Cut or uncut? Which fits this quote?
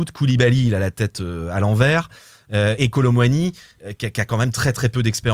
cut